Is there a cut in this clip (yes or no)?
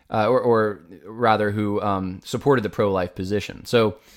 no